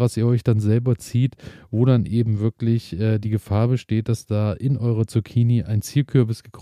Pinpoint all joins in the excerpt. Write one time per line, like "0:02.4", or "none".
none